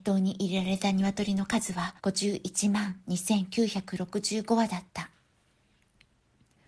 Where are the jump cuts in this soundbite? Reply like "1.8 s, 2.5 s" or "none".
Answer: 2.0 s

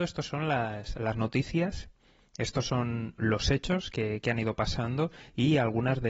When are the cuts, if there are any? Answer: none

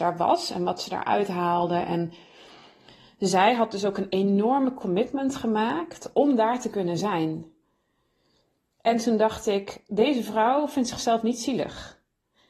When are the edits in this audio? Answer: none

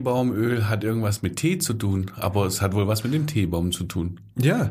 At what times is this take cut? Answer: none

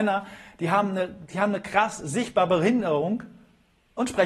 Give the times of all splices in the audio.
none

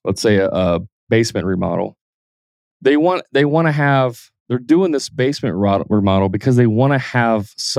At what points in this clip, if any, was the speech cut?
none

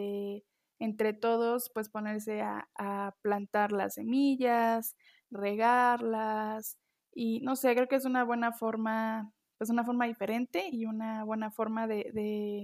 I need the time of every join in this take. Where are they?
none

